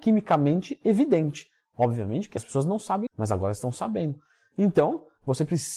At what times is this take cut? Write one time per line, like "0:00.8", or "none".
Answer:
0:02.4
0:03.1